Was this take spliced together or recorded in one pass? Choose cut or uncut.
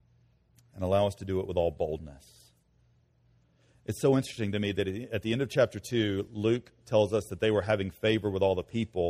uncut